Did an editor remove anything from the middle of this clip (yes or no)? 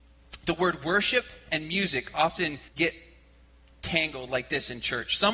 yes